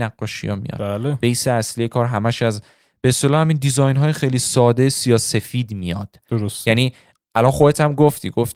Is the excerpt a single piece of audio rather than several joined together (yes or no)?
yes